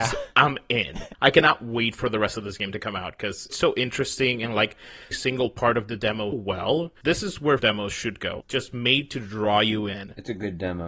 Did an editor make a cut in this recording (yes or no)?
yes